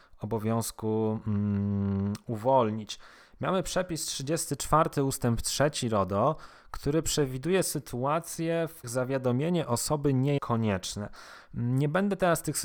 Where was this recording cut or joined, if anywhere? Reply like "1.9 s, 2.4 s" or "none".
8.8 s, 10.4 s